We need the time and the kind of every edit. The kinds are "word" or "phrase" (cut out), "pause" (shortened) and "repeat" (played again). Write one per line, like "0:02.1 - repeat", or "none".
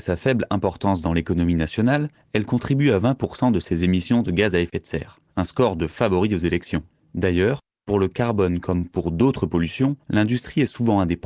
none